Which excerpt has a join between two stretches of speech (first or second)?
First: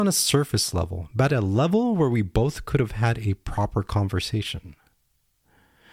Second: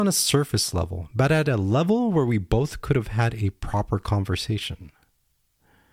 first